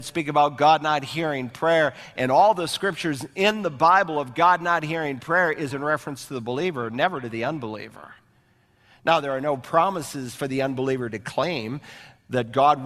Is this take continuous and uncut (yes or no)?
no